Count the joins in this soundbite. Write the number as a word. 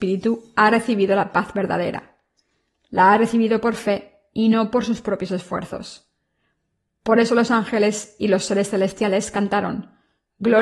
zero